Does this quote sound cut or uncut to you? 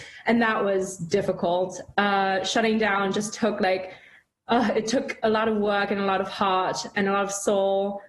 uncut